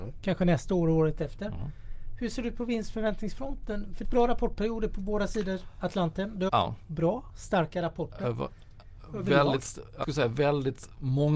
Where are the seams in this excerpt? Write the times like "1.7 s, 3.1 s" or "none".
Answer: 4.0 s, 6.5 s, 10.0 s